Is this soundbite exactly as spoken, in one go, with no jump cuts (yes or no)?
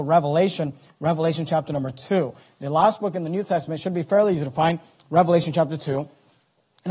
yes